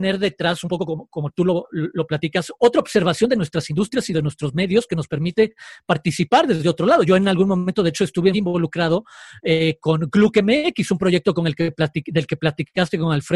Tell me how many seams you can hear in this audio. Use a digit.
1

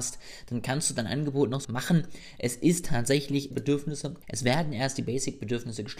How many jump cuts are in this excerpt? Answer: 3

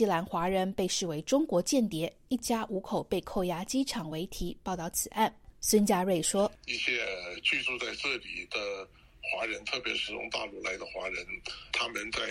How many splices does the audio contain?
0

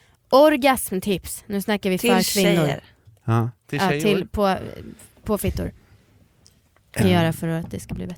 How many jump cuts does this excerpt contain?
1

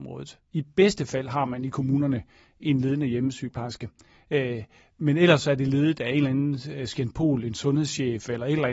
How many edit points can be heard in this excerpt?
0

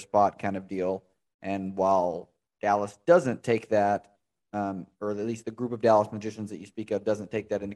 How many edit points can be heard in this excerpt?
0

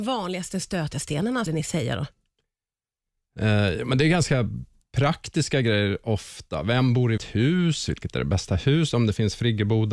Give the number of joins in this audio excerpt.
2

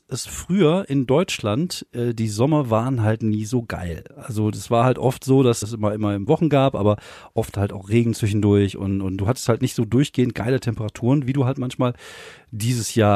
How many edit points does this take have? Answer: 2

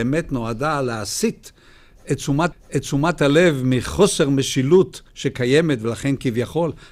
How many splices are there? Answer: 2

